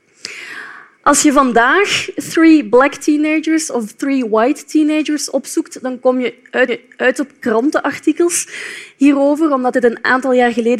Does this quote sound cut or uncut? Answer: cut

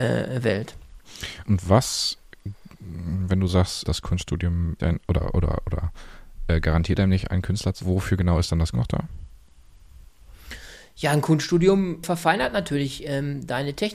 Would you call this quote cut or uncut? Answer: cut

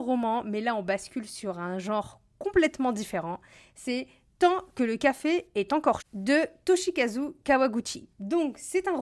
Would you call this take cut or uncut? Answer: cut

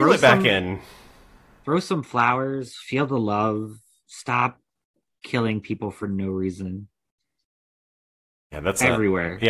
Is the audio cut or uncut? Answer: uncut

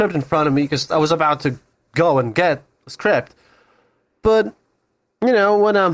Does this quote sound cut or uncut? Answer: uncut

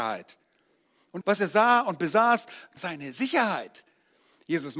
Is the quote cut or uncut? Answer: cut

